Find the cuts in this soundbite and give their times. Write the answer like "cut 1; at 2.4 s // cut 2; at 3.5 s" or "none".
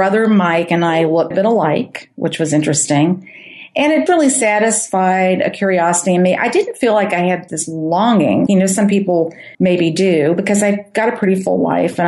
cut 1; at 1.3 s // cut 2; at 4.1 s // cut 3; at 7.5 s // cut 4; at 8.5 s // cut 5; at 9.5 s